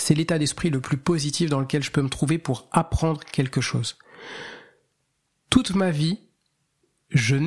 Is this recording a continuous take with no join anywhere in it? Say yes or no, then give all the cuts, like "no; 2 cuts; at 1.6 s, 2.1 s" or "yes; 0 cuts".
yes; 0 cuts